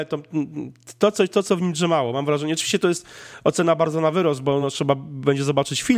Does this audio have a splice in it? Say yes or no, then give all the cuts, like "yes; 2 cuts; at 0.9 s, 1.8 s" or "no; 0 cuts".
no; 0 cuts